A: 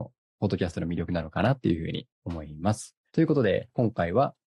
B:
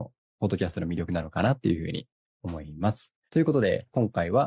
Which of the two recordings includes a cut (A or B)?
A